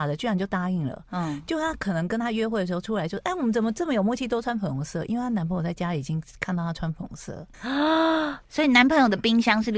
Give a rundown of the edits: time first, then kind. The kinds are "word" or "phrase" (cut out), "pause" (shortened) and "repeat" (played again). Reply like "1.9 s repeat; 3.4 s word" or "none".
7.5 s pause